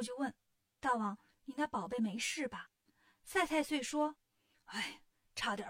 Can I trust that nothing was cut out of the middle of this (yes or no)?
yes